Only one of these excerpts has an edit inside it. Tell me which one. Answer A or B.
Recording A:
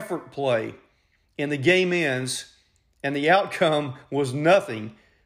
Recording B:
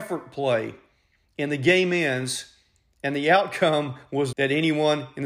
B